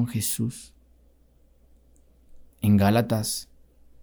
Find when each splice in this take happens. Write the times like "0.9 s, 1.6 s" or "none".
2.5 s